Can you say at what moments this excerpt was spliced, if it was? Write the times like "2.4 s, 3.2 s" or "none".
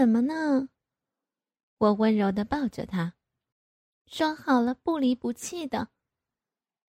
3.5 s